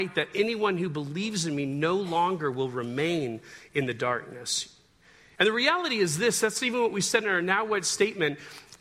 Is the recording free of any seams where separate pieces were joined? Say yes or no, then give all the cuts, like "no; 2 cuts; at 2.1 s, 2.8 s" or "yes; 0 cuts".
yes; 0 cuts